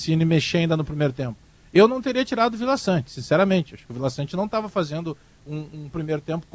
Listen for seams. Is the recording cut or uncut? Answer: uncut